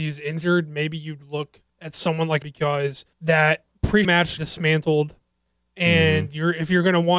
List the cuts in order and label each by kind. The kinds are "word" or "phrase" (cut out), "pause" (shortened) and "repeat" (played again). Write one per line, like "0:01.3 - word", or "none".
0:01.7 - pause
0:02.4 - phrase
0:03.1 - pause
0:04.0 - word
0:04.4 - word

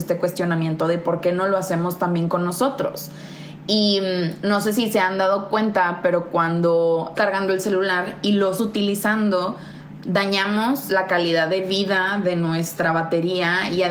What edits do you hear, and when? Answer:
0:07.1 - word
0:08.6 - word

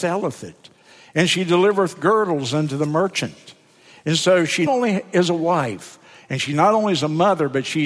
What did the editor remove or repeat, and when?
0:04.7 - word

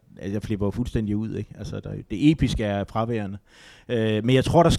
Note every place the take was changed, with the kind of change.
none

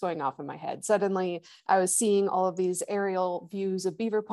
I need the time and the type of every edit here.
none

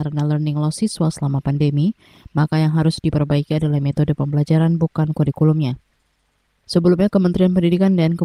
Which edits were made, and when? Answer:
none

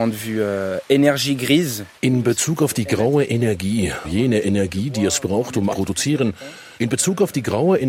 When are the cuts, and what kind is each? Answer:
0:02.0 - pause
0:04.0 - word
0:05.7 - phrase
0:06.8 - pause

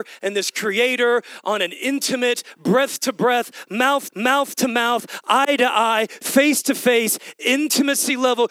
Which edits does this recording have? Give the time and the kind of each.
0:04.1 - repeat

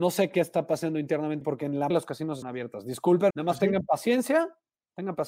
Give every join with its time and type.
0:01.4 - word
0:01.9 - word
0:02.4 - word
0:03.3 - word

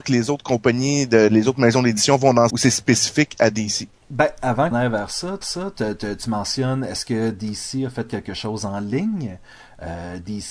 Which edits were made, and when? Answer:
0:02.5 - phrase
0:04.7 - phrase
0:05.4 - repeat

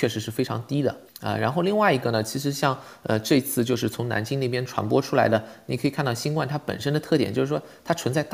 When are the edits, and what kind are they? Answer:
0:01.1 - pause

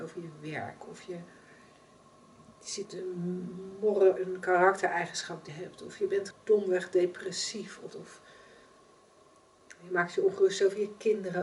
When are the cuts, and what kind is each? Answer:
0:02.8 - word
0:04.2 - word
0:05.5 - word
0:06.3 - word
0:07.9 - word

